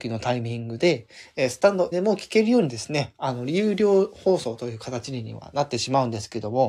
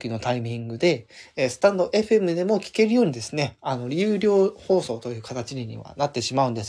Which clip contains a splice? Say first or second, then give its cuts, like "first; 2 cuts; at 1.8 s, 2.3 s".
first; 1 cut; at 1.9 s